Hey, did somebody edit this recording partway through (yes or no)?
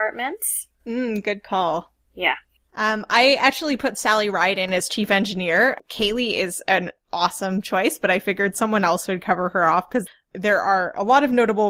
yes